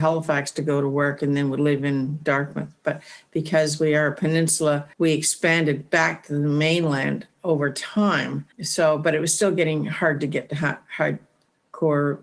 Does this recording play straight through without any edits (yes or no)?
no